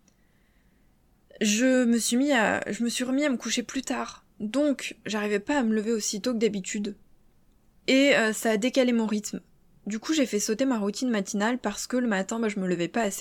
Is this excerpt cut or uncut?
uncut